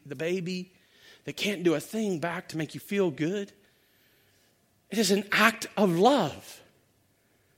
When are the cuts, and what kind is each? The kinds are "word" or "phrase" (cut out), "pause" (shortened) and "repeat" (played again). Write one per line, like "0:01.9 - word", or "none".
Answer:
none